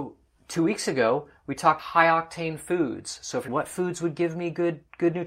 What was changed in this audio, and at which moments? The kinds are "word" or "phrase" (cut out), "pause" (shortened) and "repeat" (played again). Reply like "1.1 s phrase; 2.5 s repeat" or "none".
1.8 s word; 3.5 s word